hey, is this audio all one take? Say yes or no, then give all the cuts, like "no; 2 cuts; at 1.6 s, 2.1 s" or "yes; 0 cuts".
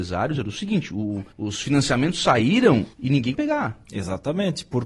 no; 3 cuts; at 1.3 s, 2.9 s, 3.3 s